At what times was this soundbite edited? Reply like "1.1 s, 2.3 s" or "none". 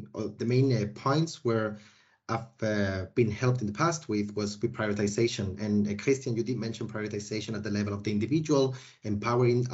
none